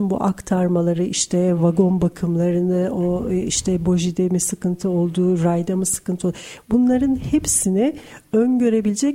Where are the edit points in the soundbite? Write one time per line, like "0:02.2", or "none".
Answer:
none

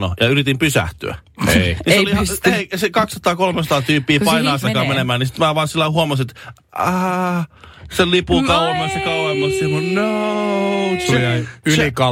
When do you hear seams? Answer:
0:04.6

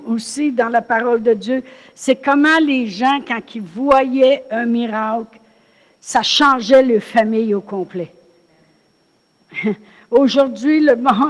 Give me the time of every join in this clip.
none

